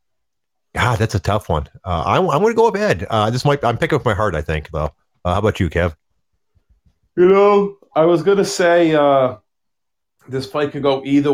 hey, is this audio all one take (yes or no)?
yes